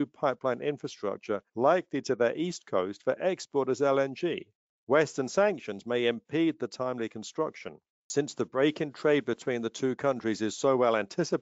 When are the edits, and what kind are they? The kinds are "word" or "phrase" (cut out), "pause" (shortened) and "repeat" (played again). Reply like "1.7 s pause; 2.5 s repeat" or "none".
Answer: 1.5 s pause; 4.7 s pause; 7.9 s pause